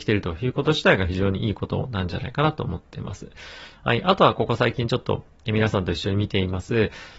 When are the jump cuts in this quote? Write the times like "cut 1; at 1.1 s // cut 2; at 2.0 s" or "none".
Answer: none